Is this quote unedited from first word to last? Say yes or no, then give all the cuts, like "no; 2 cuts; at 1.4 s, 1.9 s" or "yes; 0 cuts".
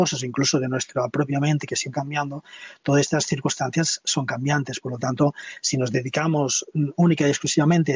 no; 1 cut; at 1.9 s